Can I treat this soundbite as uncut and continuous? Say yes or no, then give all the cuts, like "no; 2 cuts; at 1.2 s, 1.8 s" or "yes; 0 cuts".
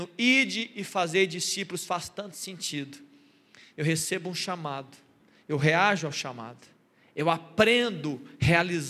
yes; 0 cuts